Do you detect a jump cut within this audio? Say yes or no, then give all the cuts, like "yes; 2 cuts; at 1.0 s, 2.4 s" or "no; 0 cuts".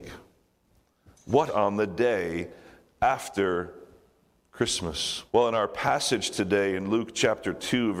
yes; 2 cuts; at 1.5 s, 5.3 s